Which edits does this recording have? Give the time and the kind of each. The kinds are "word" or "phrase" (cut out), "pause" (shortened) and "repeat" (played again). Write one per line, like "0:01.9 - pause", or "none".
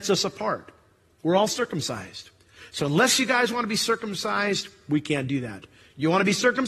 none